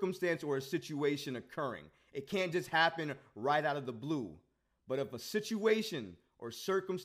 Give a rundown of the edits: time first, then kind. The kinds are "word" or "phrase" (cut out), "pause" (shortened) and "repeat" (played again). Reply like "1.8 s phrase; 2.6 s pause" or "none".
none